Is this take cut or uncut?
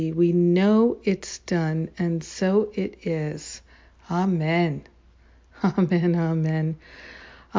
uncut